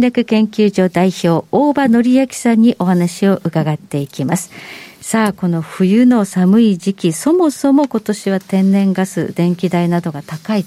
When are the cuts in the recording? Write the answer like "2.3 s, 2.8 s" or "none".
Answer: none